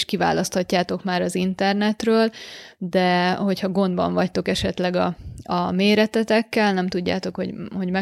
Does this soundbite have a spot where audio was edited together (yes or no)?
no